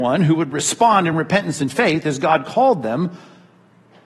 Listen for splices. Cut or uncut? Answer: uncut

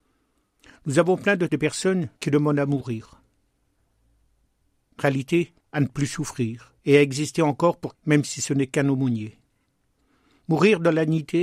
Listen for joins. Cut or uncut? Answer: cut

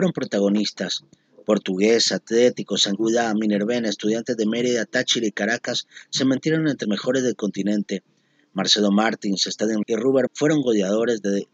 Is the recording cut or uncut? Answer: cut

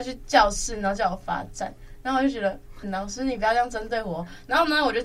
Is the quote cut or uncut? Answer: cut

